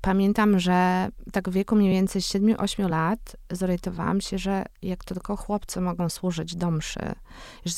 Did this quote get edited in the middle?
no; 0 cuts

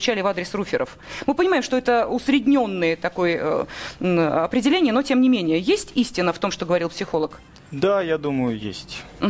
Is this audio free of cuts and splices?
yes; 0 cuts

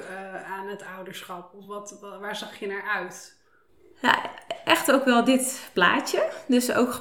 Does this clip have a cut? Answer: no; 0 cuts

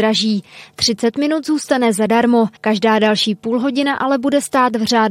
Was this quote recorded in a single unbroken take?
no; 1 cut; at 2.6 s

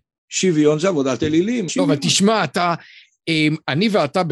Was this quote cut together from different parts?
yes; 1 cut; at 1.7 s

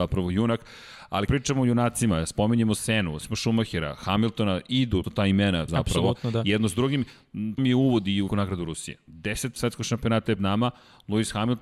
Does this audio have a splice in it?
yes; 8 cuts; at 1.3 s, 3.2 s, 5.0 s, 5.7 s, 7.6 s, 8.3 s, 9.6 s, 10.4 s

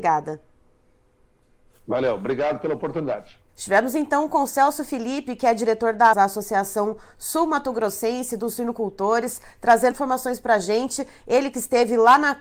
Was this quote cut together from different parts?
yes; 3 cuts; at 3.5 s, 6.1 s, 9.9 s

